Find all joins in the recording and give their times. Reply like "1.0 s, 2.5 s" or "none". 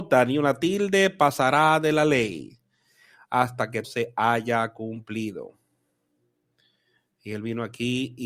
3.8 s